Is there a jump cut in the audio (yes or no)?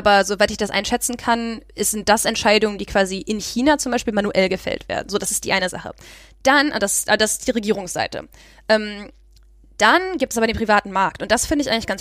no